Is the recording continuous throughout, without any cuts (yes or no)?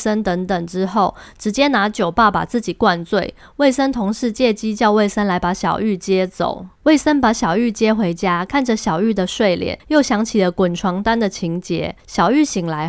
no